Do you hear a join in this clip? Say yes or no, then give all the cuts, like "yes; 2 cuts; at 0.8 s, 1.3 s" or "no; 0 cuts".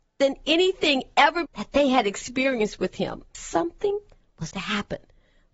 yes; 3 cuts; at 1.5 s, 3.3 s, 4.5 s